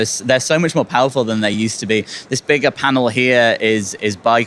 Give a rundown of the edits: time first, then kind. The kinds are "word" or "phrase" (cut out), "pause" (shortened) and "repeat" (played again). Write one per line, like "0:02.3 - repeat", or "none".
none